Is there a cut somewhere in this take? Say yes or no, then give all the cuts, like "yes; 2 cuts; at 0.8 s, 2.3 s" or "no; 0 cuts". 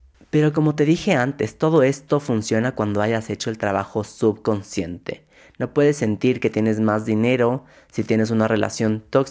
no; 0 cuts